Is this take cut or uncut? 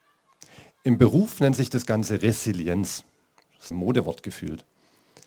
cut